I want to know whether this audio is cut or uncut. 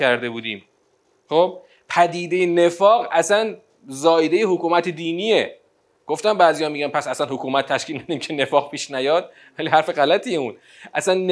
uncut